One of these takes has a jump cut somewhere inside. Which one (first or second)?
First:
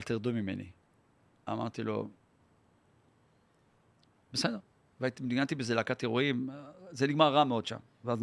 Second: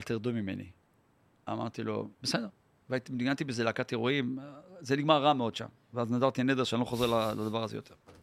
second